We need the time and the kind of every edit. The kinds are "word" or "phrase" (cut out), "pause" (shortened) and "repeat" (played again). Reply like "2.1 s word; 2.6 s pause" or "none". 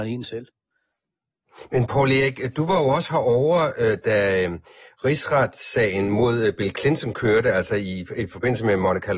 none